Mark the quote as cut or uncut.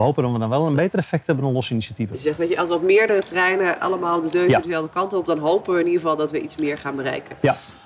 uncut